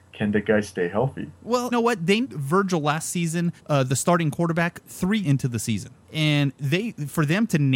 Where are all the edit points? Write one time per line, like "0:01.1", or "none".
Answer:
0:01.7
0:02.2
0:03.6
0:05.2
0:06.0